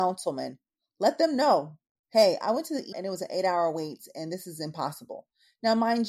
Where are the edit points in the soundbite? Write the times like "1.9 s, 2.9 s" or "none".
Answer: 2.9 s